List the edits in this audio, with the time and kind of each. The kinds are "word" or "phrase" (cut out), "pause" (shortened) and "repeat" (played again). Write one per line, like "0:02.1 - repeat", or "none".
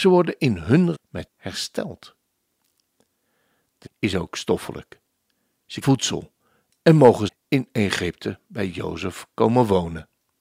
0:00.9 - word
0:01.3 - word
0:03.9 - word
0:05.8 - word
0:07.3 - word